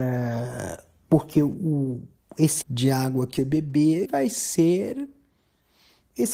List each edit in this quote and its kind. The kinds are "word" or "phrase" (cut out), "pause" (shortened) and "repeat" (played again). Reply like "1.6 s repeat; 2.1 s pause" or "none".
2.6 s word; 3.4 s word; 4.0 s word